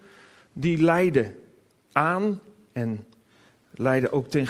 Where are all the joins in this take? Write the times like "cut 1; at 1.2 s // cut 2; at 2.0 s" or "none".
none